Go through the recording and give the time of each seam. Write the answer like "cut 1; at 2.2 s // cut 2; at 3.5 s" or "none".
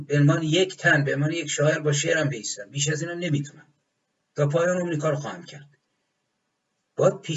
cut 1; at 3.8 s

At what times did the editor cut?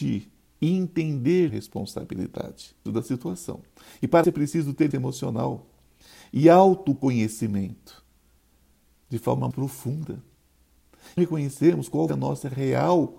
cut 1; at 1.5 s // cut 2; at 2.9 s // cut 3; at 4.2 s // cut 4; at 4.9 s // cut 5; at 9.5 s // cut 6; at 11.2 s // cut 7; at 12.1 s

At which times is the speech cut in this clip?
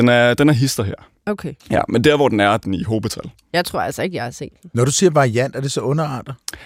cut 1; at 1.6 s // cut 2; at 2.6 s

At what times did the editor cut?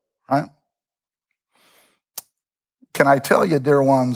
none

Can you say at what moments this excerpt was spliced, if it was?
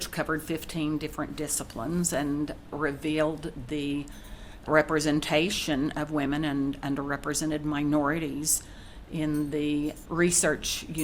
cut 1; at 2.7 s // cut 2; at 4.7 s // cut 3; at 10.0 s

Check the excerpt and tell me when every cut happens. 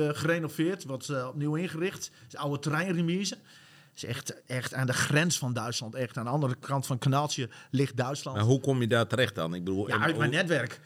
none

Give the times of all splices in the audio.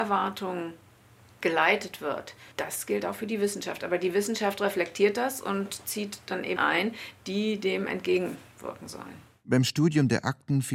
cut 1; at 2.5 s // cut 2; at 6.6 s

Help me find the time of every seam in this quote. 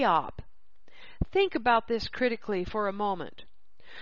none

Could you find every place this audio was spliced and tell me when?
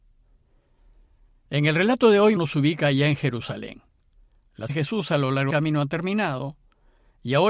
cut 1; at 2.4 s // cut 2; at 4.7 s // cut 3; at 5.5 s

